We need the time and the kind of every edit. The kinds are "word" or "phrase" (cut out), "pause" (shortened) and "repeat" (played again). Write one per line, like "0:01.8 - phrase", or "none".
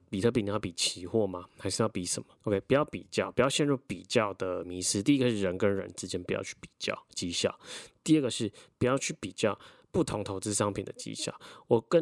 0:02.4 - pause